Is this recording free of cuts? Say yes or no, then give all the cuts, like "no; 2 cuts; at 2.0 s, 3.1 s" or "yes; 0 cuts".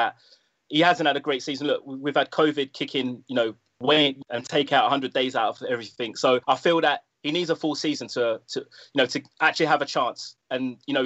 no; 3 cuts; at 4.2 s, 6.4 s, 9.3 s